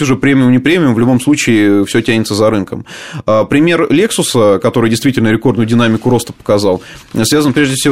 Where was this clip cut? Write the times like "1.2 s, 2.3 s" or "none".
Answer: none

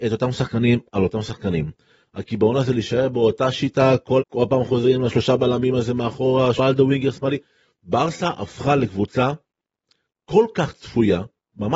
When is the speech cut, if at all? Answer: 4.2 s, 6.6 s

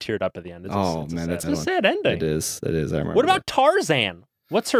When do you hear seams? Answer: 1.4 s

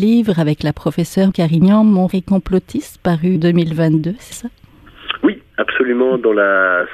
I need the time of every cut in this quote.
1.3 s, 2.1 s, 3.3 s, 4.3 s

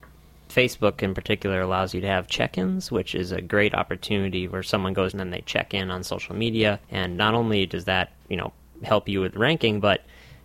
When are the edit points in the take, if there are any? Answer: 5.1 s, 6.8 s

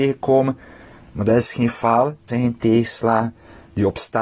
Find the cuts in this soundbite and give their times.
2.3 s

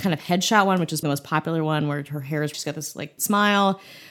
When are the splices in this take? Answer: 1.0 s, 2.5 s, 3.2 s

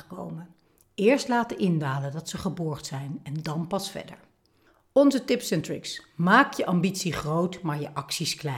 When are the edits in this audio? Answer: none

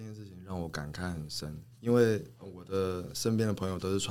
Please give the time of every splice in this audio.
1.7 s, 2.3 s

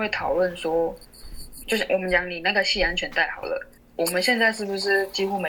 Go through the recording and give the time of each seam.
1.6 s, 3.8 s

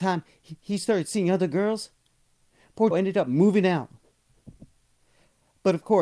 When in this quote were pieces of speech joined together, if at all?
2.9 s

